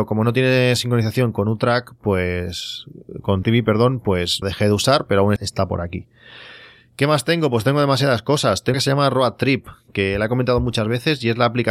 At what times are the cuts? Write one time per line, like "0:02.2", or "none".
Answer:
0:03.4
0:04.4
0:05.4
0:08.7